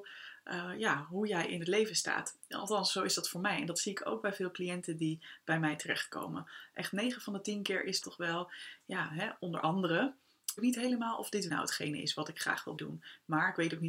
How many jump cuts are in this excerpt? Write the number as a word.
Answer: four